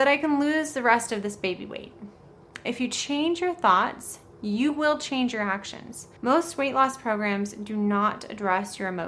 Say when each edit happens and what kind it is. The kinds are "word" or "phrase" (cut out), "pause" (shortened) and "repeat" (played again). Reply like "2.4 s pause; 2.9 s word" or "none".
6.2 s pause